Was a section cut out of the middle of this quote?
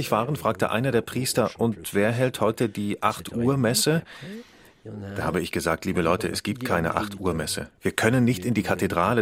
no; 0 cuts

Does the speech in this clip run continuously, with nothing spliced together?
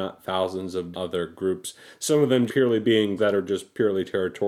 no; 3 cuts; at 0.9 s, 2.5 s, 3.2 s

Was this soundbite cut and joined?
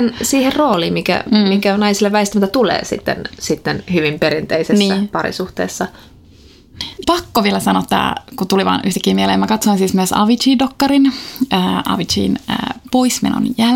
yes; 1 cut; at 7.0 s

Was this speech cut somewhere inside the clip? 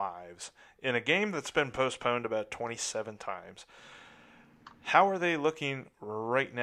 no; 0 cuts

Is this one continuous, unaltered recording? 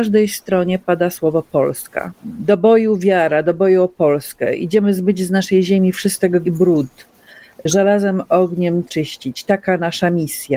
no; 3 cuts; at 2.2 s, 6.4 s, 8.9 s

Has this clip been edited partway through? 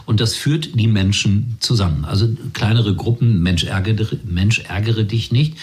no; 0 cuts

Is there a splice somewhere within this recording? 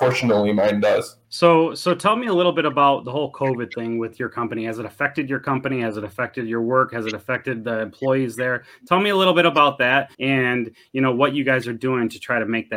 yes; 2 cuts; at 1.2 s, 10.1 s

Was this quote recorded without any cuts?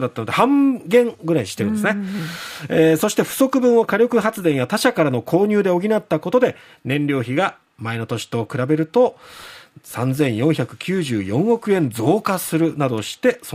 yes; 0 cuts

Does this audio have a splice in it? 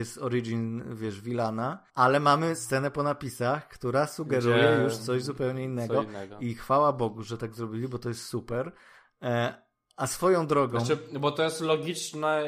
yes; 1 cut; at 1.9 s

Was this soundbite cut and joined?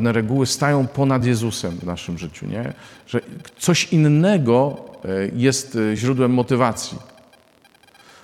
no; 0 cuts

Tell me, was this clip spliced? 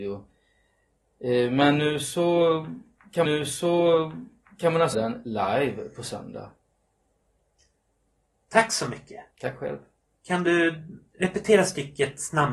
yes; 3 cuts; at 3.2 s, 4.9 s, 9.3 s

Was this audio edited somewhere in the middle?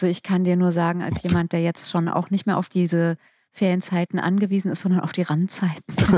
no; 0 cuts

